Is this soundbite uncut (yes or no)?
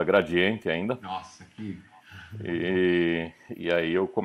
yes